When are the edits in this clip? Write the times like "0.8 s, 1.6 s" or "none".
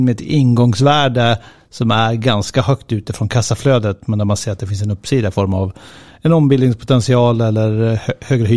none